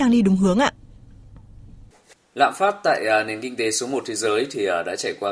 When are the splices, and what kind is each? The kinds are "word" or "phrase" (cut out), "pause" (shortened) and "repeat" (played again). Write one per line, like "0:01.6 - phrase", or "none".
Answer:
none